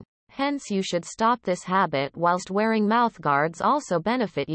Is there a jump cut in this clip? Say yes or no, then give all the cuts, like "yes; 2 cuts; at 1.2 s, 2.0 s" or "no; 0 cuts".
no; 0 cuts